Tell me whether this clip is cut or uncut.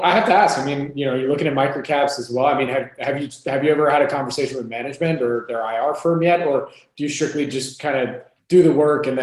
uncut